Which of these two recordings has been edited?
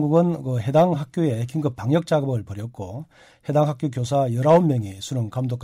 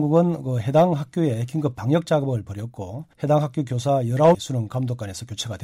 second; 2 cuts; at 3.1 s, 4.3 s

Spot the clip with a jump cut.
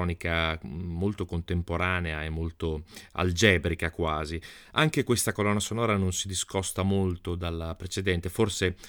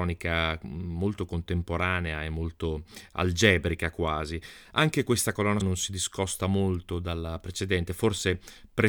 second; 1 cut; at 5.6 s

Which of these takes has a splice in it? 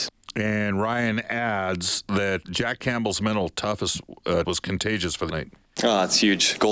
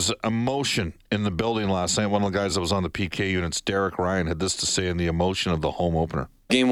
first; 3 cuts; at 2.4 s, 4.4 s, 5.3 s

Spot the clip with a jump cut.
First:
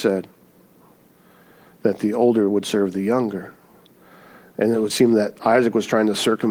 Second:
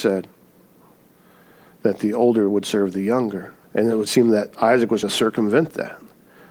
second; 2 cuts; at 3.6 s, 5.0 s

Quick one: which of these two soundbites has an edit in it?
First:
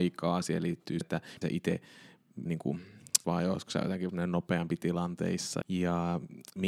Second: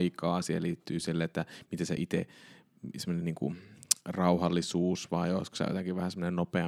first; 6 cuts; at 1.0 s, 1.4 s, 2.5 s, 3.2 s, 4.1 s, 5.6 s

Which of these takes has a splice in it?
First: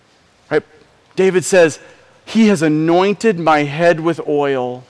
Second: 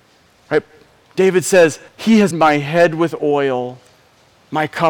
second; 2 cuts; at 1.9 s, 2.3 s

